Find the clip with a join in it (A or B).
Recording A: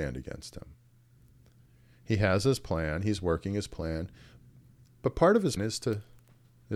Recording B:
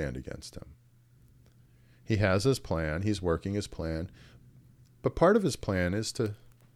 A